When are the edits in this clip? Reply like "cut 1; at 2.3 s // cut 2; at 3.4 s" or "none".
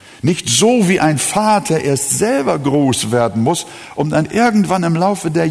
none